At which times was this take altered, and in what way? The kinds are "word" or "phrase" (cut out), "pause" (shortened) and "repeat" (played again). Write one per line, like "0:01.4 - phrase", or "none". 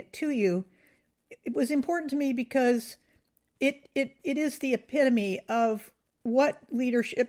none